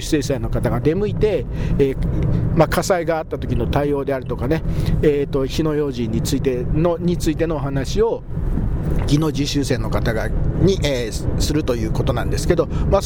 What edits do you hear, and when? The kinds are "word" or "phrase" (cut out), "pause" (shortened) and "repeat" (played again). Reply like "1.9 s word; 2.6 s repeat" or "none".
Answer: none